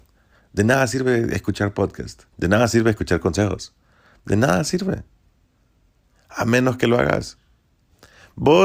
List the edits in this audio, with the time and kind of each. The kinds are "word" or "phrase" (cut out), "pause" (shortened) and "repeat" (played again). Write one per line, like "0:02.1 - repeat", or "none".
0:02.3 - pause